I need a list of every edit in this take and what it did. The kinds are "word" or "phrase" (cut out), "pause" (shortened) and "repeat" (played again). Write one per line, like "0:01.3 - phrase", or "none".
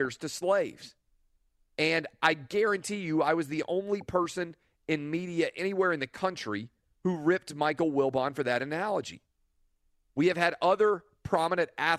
none